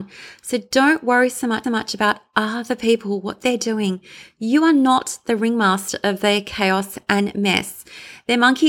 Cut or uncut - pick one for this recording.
cut